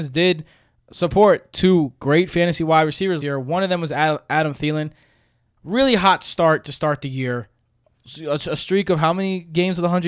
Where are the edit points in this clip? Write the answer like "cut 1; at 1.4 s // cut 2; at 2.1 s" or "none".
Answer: cut 1; at 3.2 s